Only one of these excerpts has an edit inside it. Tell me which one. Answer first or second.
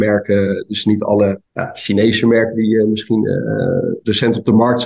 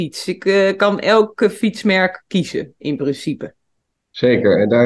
first